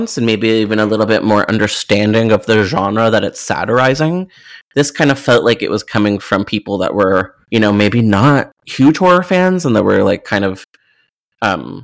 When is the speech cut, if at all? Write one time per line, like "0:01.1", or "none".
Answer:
0:07.4
0:08.6